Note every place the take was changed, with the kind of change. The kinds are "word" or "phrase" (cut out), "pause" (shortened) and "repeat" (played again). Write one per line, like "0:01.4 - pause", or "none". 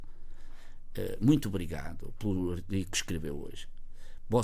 none